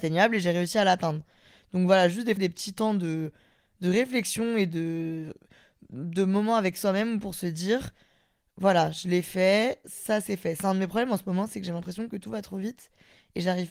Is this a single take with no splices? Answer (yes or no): no